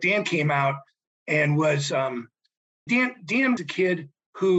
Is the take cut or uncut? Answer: cut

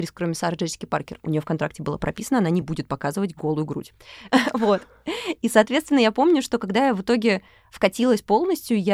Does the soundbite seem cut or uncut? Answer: uncut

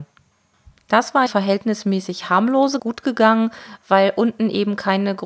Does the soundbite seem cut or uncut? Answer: cut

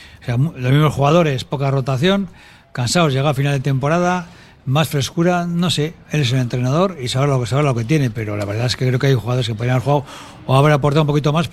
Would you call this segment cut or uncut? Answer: uncut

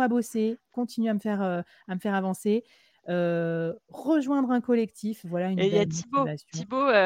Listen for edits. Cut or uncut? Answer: uncut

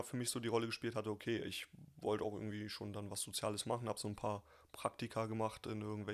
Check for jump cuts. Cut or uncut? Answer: uncut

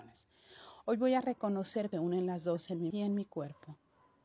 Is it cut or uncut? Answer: cut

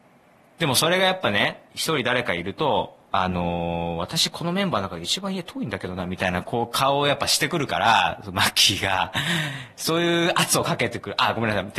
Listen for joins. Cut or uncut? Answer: cut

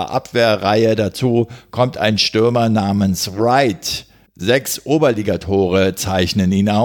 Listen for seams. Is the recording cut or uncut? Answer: cut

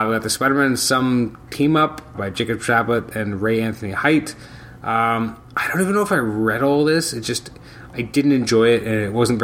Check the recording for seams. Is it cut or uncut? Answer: cut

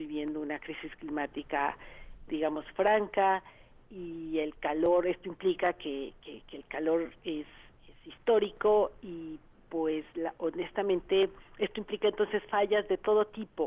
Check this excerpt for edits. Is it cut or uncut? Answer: cut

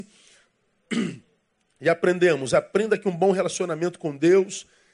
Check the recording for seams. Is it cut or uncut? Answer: uncut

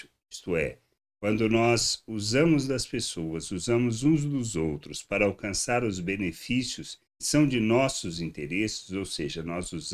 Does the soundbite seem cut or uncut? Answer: cut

